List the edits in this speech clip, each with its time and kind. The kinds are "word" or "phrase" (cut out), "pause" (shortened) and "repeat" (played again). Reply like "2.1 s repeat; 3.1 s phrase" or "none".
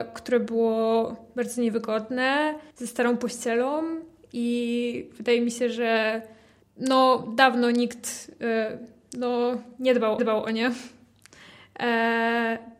2.7 s pause; 6.6 s pause; 10.2 s repeat